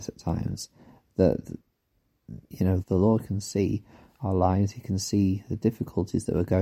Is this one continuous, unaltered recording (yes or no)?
no